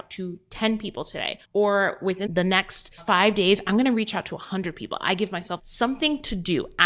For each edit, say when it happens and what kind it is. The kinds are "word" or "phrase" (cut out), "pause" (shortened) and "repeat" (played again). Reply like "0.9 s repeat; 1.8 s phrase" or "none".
1.4 s pause; 2.3 s word; 3.0 s word; 5.6 s phrase